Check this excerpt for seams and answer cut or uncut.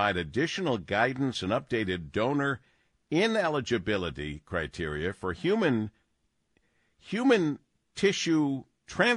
uncut